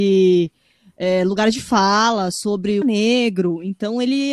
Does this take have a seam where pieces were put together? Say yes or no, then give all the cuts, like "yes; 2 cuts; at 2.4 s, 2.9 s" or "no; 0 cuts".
yes; 1 cut; at 2.8 s